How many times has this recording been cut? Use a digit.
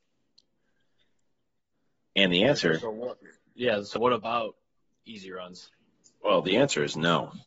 1